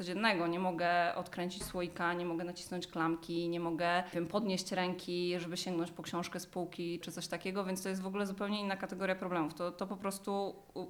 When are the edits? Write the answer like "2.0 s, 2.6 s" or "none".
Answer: 7.0 s